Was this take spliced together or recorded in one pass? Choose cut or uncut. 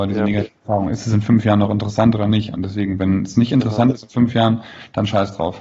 uncut